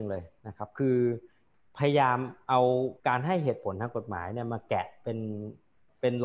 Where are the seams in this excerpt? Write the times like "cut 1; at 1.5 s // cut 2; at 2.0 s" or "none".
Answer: cut 1; at 3.0 s